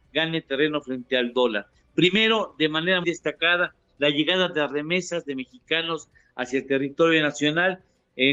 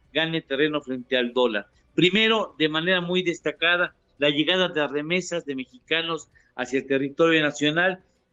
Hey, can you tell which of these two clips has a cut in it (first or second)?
first